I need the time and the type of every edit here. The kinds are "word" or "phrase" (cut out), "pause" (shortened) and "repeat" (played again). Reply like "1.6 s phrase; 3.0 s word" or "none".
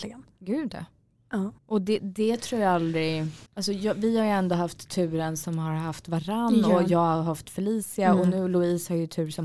1.6 s pause; 3.5 s pause